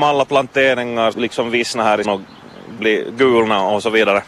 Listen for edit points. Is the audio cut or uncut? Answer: cut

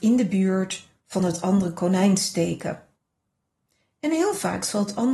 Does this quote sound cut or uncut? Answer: uncut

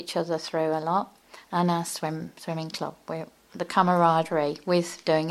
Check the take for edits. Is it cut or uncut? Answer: uncut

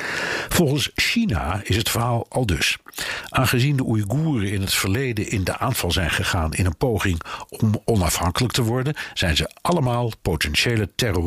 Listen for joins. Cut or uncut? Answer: uncut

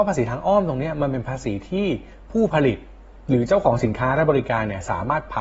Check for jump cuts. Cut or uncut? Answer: uncut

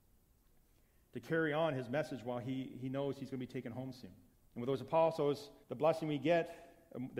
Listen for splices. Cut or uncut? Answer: cut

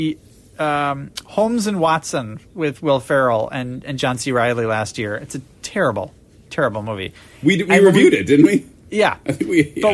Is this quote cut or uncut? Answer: uncut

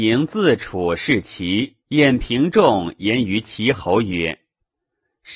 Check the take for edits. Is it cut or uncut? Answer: cut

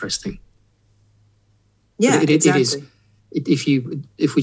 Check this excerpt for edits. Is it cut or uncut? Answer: uncut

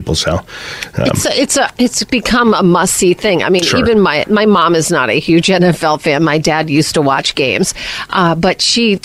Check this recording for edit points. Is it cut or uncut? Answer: uncut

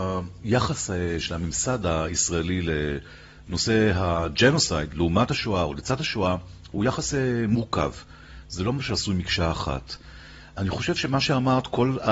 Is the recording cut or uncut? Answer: uncut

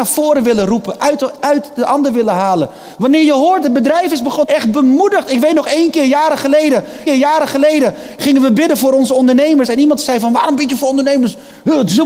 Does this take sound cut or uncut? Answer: cut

